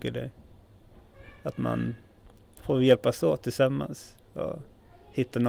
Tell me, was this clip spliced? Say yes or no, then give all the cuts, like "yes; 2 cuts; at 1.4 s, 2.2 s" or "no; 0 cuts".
no; 0 cuts